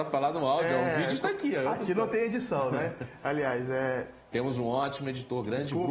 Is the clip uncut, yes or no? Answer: yes